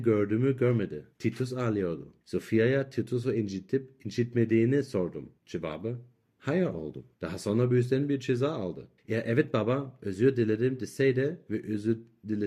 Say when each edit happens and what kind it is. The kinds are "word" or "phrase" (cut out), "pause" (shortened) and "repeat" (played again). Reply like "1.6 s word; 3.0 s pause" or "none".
1.1 s pause; 2.2 s pause; 5.4 s pause; 7.1 s pause; 9.0 s pause

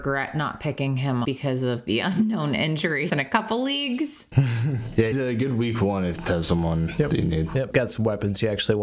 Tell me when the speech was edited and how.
1.2 s word; 3.1 s word; 5.1 s word; 6.2 s word; 7.7 s word

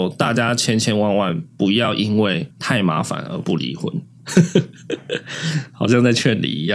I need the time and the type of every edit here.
2.5 s pause

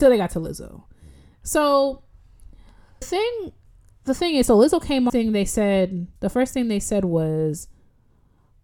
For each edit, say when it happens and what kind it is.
3.0 s word; 5.1 s phrase; 6.2 s pause

